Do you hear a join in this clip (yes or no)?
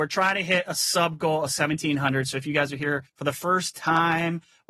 yes